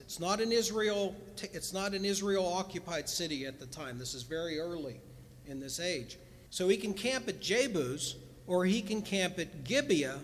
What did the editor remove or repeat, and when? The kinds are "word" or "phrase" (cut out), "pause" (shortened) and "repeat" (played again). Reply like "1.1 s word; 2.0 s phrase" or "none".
6.5 s pause